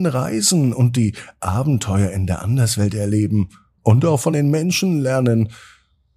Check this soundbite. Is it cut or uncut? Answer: uncut